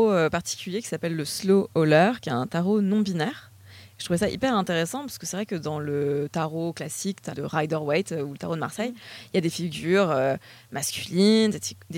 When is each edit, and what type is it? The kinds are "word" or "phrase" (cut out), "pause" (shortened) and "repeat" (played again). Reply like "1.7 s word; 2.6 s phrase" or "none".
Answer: 7.3 s word